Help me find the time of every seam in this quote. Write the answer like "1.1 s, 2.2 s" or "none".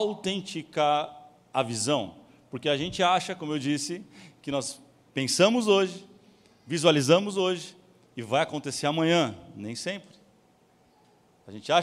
none